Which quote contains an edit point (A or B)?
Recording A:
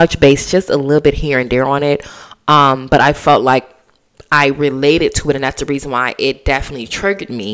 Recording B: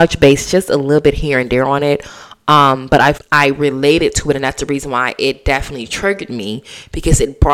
B